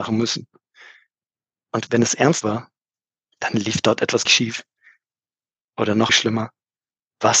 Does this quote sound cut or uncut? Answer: cut